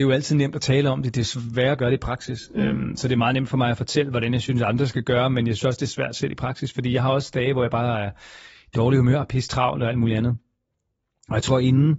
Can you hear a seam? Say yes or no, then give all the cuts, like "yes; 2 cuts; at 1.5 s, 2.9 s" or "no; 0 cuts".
no; 0 cuts